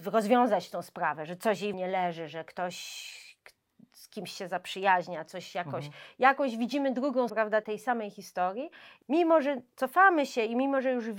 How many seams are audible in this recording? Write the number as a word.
three